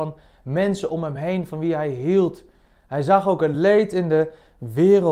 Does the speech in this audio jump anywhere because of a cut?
no; 0 cuts

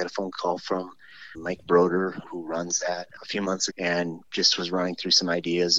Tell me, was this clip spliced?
yes; 4 cuts; at 1.3 s, 2.2 s, 3.2 s, 3.7 s

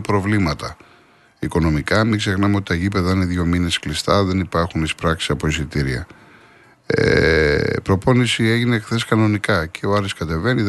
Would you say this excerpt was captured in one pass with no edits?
yes; 0 cuts

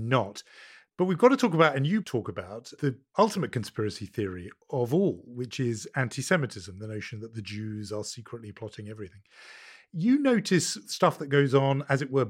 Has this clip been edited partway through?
no; 0 cuts

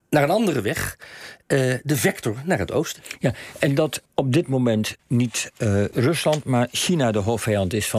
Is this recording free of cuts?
no; 3 cuts; at 4.1 s, 5.0 s, 5.9 s

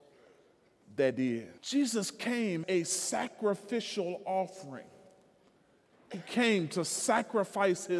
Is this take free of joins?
no; 3 cuts; at 1.1 s, 1.6 s, 2.6 s

